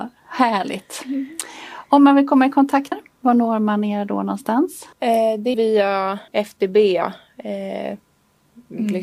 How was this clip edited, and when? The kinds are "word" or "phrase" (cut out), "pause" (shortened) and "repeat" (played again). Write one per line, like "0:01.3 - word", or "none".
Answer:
0:02.9 - word
0:04.9 - pause
0:05.5 - word
0:06.3 - pause